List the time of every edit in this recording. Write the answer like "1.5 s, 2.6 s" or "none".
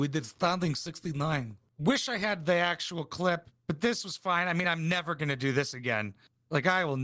none